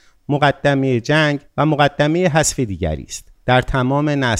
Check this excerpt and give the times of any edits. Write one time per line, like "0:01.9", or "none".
0:01.5
0:03.4